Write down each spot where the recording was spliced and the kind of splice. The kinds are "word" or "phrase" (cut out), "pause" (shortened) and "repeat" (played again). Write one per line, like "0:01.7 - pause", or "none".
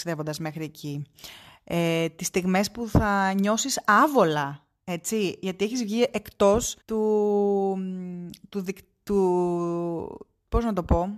0:06.8 - pause